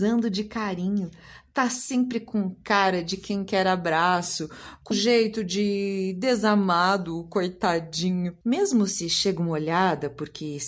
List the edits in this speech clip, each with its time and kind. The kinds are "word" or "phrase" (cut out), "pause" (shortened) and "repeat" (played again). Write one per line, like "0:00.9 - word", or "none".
0:04.9 - word
0:08.4 - pause